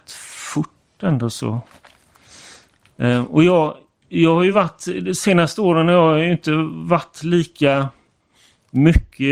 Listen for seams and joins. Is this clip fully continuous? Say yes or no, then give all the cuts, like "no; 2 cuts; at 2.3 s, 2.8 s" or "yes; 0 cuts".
yes; 0 cuts